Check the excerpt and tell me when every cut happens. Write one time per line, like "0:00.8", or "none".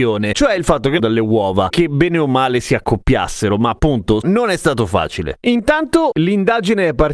0:01.0
0:01.7
0:04.2